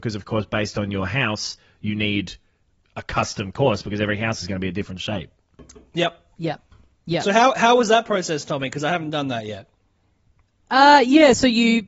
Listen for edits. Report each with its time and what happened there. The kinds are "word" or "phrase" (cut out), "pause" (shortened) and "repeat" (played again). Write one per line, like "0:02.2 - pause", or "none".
none